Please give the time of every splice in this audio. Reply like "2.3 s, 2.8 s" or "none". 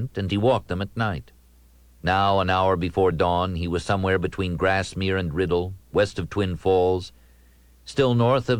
none